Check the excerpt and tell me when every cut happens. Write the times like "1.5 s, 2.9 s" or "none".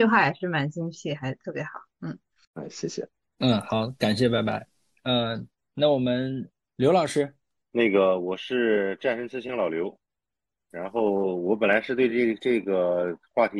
none